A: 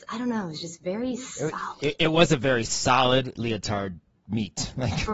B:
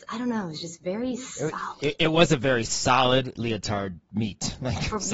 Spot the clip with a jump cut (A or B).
B